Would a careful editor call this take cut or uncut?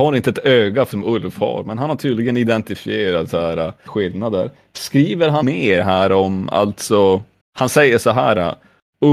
cut